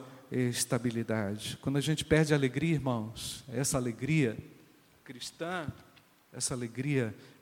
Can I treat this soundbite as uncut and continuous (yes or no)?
yes